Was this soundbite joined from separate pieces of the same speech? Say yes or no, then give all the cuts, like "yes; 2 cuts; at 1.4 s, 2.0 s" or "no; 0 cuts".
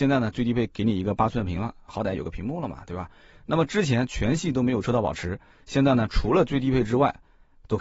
no; 0 cuts